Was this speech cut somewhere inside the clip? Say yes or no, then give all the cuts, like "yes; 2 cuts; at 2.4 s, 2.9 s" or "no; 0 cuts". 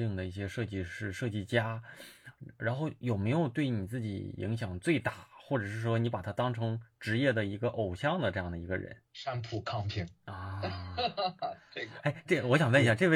yes; 1 cut; at 9.1 s